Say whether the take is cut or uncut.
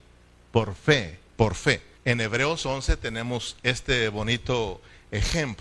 cut